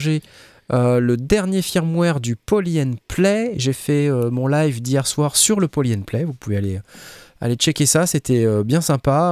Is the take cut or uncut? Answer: uncut